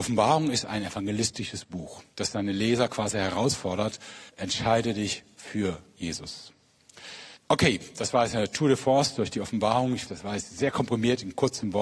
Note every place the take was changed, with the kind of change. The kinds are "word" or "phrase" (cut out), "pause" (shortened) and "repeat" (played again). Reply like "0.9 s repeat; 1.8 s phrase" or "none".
2.1 s pause; 4.3 s pause; 7.4 s pause; 10.1 s word